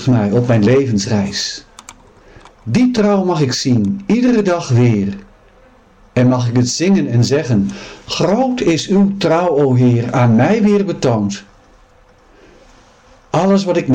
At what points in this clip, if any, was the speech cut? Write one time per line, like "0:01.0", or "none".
none